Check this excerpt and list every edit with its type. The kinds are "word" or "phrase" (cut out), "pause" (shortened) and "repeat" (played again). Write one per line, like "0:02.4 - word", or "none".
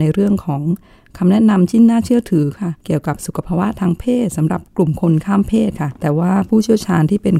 0:02.8 - pause
0:06.0 - pause